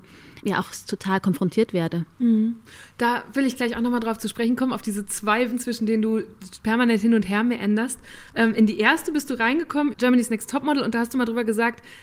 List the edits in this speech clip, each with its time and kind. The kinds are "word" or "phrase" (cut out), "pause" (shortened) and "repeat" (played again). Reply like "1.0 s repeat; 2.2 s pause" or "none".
5.5 s word; 9.9 s word